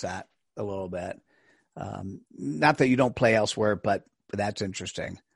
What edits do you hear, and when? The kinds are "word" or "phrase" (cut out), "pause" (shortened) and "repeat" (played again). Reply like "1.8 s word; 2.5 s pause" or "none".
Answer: none